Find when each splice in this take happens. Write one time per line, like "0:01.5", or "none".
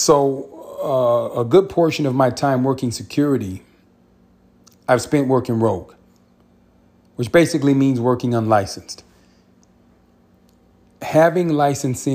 none